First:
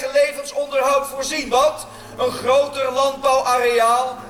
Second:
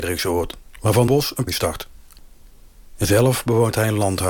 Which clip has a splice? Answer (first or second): second